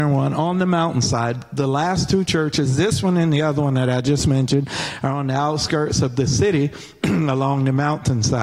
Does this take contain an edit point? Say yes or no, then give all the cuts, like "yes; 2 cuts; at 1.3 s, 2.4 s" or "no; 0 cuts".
no; 0 cuts